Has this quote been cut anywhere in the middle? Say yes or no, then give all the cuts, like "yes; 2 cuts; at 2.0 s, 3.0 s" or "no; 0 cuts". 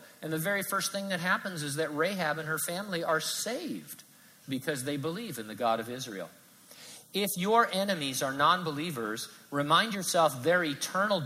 no; 0 cuts